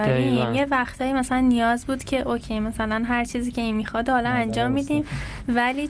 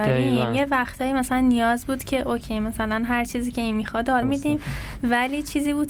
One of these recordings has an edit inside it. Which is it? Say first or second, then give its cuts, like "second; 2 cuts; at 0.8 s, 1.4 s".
second; 1 cut; at 4.2 s